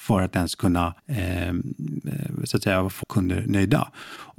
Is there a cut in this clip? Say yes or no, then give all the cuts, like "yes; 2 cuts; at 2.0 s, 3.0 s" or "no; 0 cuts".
yes; 2 cuts; at 1.0 s, 3.0 s